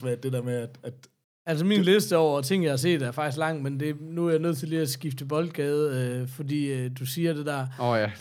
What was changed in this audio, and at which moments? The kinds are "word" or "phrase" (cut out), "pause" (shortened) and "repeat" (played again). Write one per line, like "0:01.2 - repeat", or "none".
0:01.2 - pause